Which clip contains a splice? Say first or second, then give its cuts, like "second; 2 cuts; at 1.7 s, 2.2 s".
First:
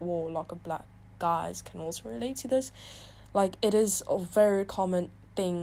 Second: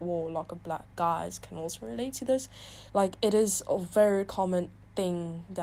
second; 2 cuts; at 0.9 s, 2.9 s